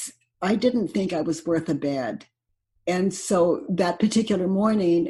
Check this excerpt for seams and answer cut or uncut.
uncut